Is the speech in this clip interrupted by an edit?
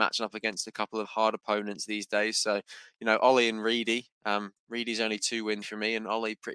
yes; 2 cuts; at 1.0 s, 5.6 s

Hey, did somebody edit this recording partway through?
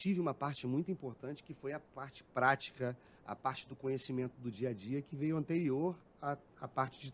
no; 0 cuts

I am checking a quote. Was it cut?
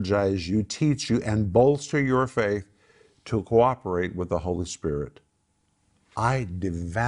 no; 0 cuts

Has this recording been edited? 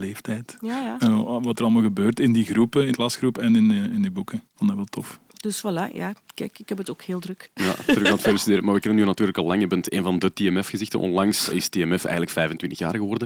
yes; 4 cuts; at 2.9 s, 4.5 s, 5.3 s, 11.5 s

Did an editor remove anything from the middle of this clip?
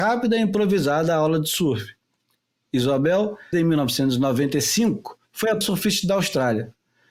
yes; 3 cuts; at 3.5 s, 5.2 s, 5.6 s

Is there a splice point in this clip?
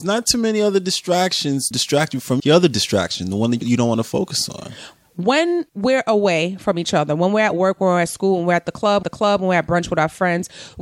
yes; 5 cuts; at 1.7 s, 2.4 s, 3.6 s, 5.7 s, 9.0 s

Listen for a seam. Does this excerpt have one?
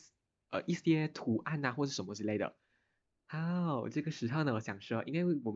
no; 0 cuts

